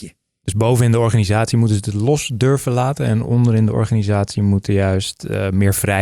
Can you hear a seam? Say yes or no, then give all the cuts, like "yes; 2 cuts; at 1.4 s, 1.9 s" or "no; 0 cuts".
no; 0 cuts